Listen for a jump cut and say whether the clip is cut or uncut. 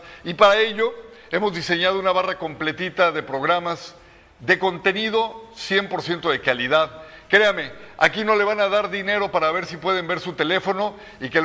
uncut